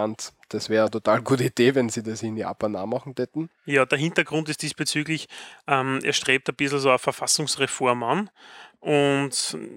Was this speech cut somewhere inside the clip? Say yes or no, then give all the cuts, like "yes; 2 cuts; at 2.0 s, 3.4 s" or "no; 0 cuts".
no; 0 cuts